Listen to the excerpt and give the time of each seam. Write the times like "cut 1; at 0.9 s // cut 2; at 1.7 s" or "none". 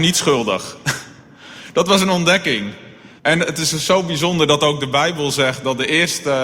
cut 1; at 3.2 s